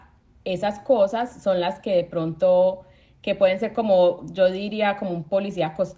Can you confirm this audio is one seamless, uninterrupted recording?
yes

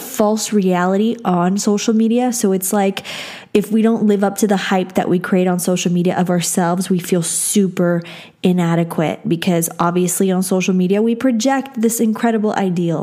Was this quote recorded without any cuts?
yes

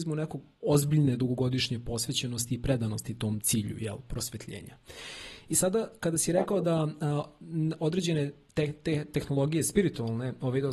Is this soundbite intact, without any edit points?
yes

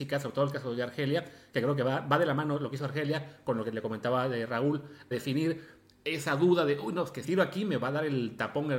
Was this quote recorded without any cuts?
no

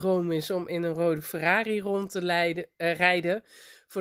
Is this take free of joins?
yes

